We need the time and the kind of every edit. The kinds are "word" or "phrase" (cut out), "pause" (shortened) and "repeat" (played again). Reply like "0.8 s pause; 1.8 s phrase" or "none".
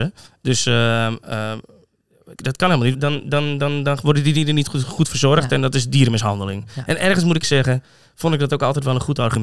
2.4 s word; 2.9 s word; 7.4 s word